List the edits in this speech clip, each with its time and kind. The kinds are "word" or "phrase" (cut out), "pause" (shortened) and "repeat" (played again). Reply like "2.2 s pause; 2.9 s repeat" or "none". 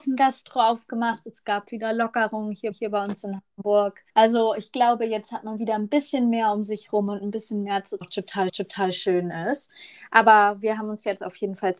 2.7 s repeat; 4.1 s pause; 8.0 s phrase; 8.5 s repeat